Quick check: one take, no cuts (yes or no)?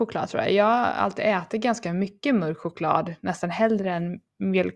yes